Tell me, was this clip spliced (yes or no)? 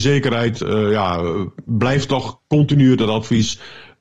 no